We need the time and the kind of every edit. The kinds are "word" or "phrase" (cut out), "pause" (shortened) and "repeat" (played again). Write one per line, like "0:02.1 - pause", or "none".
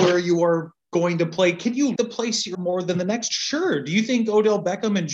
0:02.0 - word
0:02.5 - word